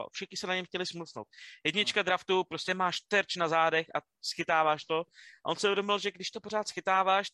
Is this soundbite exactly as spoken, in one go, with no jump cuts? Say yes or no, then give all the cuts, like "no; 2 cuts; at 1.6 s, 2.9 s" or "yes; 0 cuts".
yes; 0 cuts